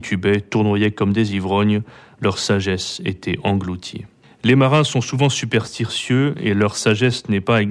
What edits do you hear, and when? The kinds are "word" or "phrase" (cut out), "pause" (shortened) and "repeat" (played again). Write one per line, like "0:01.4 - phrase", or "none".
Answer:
none